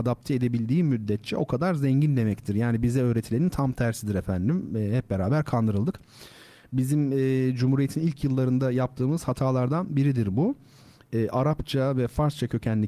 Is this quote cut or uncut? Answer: uncut